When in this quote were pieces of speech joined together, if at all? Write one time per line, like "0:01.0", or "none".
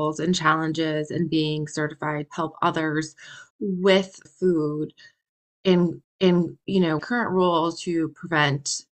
0:02.3
0:04.3
0:06.0
0:07.0